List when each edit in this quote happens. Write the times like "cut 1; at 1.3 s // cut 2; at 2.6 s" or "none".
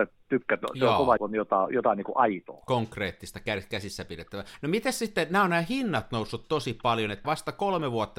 cut 1; at 1.2 s // cut 2; at 7.2 s

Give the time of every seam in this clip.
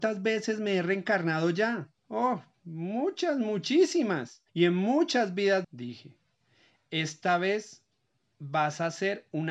cut 1; at 2.0 s // cut 2; at 4.5 s // cut 3; at 5.6 s

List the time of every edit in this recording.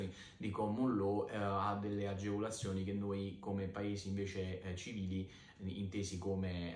none

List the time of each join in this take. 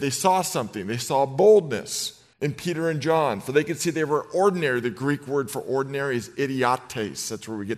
cut 1; at 2.3 s

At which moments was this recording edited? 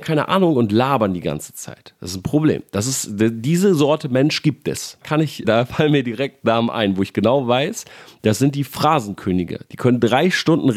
cut 1; at 5.0 s // cut 2; at 5.4 s

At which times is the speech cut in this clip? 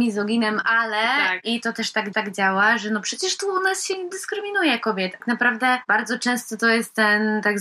cut 1; at 2.1 s // cut 2; at 5.2 s

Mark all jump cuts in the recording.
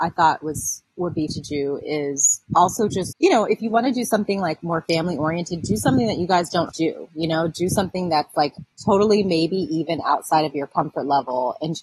cut 1; at 1.3 s // cut 2; at 3.1 s // cut 3; at 6.7 s // cut 4; at 8.7 s

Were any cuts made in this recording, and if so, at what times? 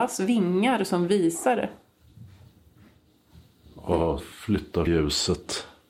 cut 1; at 4.2 s // cut 2; at 4.9 s

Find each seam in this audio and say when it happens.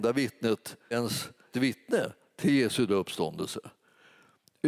cut 1; at 0.9 s // cut 2; at 1.5 s // cut 3; at 2.9 s

